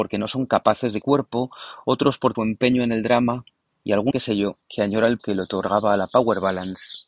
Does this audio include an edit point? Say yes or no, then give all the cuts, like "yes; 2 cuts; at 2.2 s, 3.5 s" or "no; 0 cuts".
yes; 6 cuts; at 1.0 s, 2.3 s, 3.7 s, 4.1 s, 4.6 s, 5.2 s